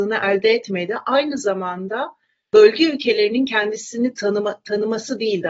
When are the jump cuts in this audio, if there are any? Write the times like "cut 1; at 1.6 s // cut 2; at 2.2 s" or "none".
none